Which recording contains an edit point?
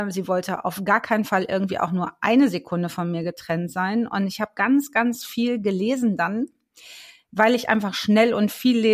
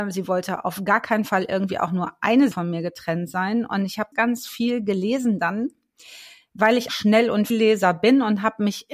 second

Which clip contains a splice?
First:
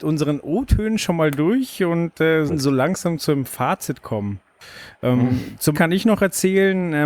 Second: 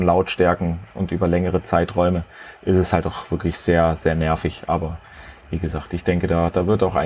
first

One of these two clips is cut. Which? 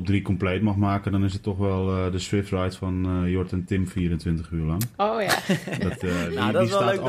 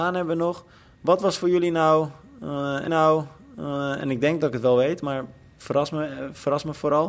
second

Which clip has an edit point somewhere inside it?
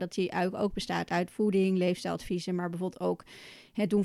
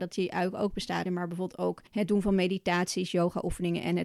second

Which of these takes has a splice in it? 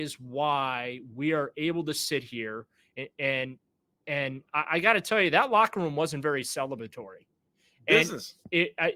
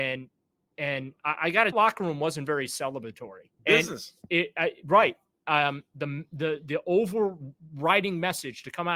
second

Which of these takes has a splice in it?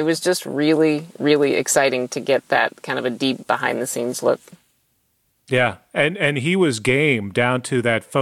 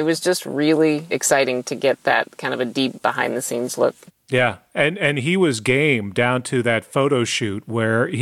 second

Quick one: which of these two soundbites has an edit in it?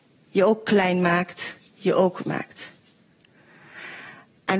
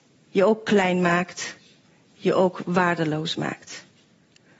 first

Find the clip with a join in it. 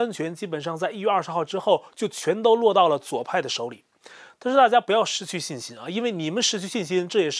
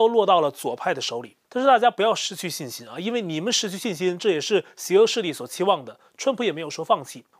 second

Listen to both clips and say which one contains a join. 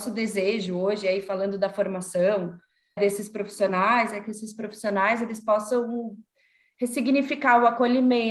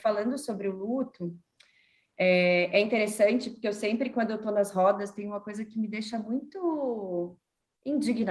first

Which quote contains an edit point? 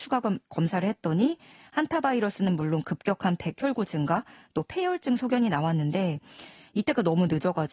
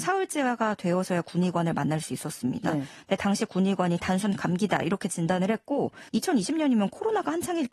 second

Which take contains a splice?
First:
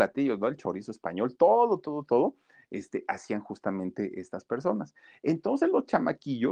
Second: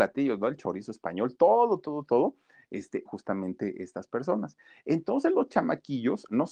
second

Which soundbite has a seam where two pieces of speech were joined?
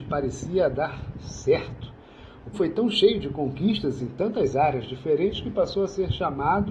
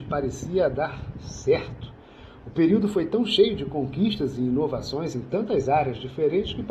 first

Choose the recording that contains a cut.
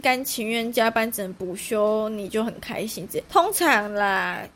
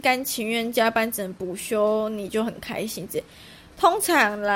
first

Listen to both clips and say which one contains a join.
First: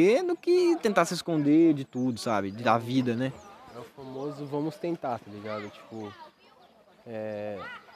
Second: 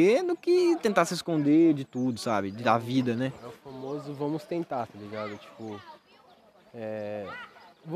second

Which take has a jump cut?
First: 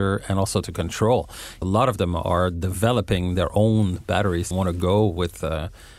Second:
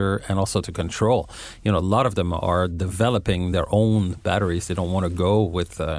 first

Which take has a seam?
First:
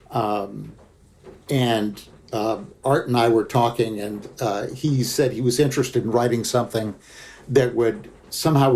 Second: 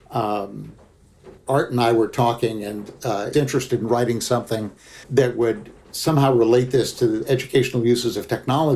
second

